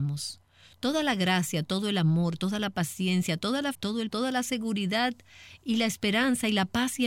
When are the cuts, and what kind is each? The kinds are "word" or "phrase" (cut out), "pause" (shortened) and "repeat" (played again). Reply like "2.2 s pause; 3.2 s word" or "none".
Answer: 3.7 s word; 4.1 s word